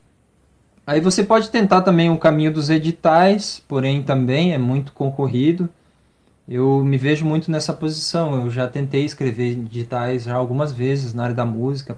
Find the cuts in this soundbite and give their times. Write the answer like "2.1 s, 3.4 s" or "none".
none

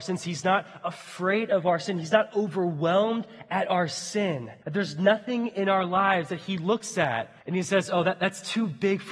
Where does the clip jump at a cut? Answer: 4.6 s, 7.4 s

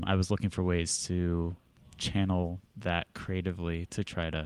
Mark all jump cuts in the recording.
none

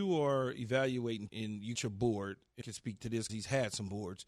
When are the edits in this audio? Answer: 1.3 s, 1.7 s, 2.6 s, 3.3 s

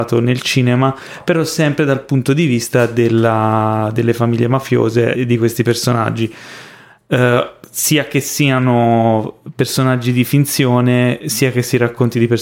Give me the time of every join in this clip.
5.1 s

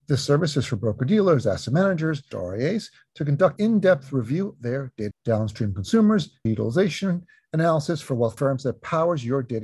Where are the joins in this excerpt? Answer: 2.3 s, 3.6 s, 4.6 s, 5.1 s, 6.5 s, 8.4 s

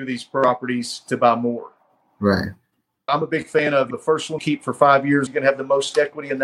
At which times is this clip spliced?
3.1 s, 3.9 s, 4.4 s, 5.3 s

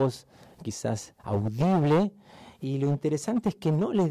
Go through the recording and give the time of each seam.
1.2 s

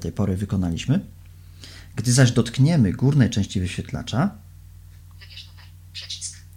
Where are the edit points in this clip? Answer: none

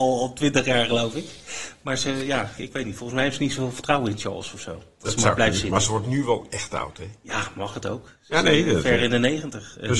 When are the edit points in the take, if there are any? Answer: 2.6 s

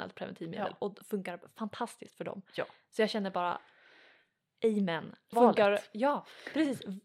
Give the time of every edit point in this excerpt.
5.3 s

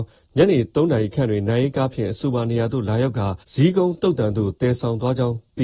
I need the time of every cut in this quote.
3.4 s

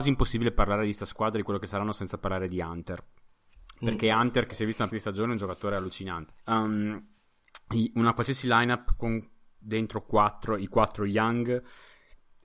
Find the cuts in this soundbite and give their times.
4.9 s, 6.4 s

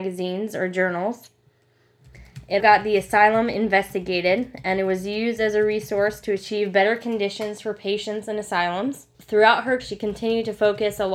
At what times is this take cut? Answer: 2.6 s, 9.1 s, 9.8 s

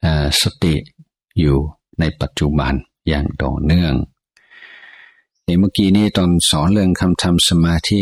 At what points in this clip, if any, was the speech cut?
none

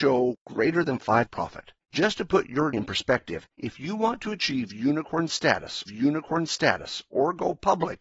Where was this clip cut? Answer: 1.3 s, 1.8 s, 2.7 s, 3.5 s, 5.9 s

